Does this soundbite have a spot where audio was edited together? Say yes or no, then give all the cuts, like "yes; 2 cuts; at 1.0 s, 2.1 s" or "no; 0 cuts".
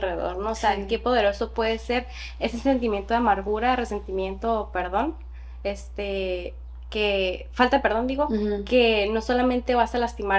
no; 0 cuts